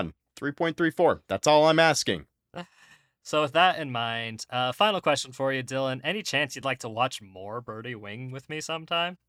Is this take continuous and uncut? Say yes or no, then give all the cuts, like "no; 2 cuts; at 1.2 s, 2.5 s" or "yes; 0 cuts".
yes; 0 cuts